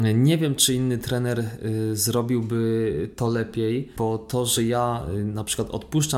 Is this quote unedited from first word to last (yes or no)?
yes